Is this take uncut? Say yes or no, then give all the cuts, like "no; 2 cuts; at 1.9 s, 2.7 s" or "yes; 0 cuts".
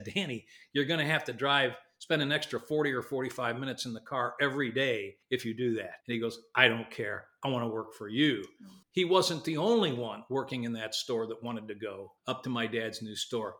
no; 4 cuts; at 5.2 s, 6.0 s, 8.8 s, 12.2 s